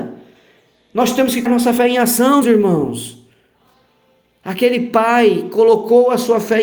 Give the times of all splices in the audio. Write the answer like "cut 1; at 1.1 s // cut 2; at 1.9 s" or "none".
cut 1; at 1.5 s // cut 2; at 2.4 s